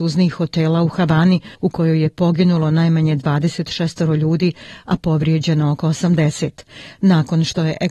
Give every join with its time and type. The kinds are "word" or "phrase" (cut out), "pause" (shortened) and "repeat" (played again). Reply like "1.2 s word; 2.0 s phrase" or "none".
1.5 s pause